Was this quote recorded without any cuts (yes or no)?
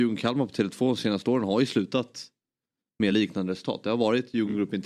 yes